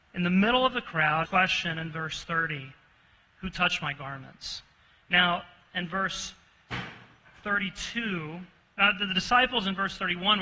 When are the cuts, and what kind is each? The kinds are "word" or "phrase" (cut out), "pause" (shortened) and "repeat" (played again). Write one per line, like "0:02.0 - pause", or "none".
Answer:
0:01.2 - phrase